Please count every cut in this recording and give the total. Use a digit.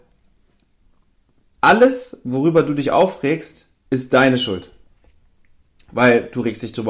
0